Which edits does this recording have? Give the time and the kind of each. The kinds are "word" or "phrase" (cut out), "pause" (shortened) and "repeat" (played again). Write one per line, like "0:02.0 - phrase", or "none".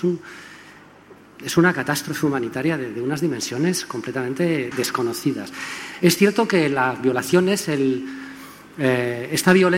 0:04.7 - word